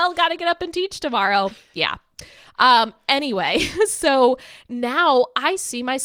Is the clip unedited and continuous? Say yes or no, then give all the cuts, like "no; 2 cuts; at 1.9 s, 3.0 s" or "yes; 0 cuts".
yes; 0 cuts